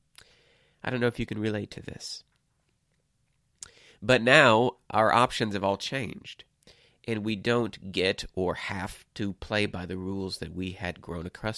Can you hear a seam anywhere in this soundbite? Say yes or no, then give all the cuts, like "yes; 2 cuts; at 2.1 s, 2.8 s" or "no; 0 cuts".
no; 0 cuts